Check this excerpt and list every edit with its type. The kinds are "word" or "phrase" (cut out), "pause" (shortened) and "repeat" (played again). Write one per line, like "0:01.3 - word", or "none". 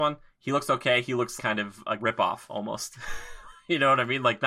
0:01.4 - word
0:02.0 - word